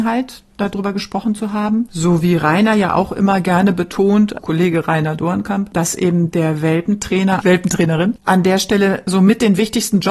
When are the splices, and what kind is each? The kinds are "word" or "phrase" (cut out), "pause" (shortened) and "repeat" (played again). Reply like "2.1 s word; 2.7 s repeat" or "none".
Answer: 4.4 s word